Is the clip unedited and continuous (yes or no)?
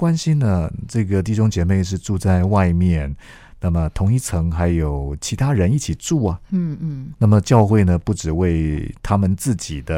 no